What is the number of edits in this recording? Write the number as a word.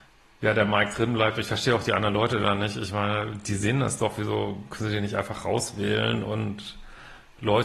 zero